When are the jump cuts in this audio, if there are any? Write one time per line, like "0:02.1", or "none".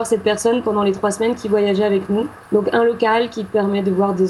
0:02.5